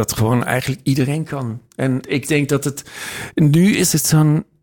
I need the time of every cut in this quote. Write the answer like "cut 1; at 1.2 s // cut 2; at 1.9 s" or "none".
cut 1; at 2.0 s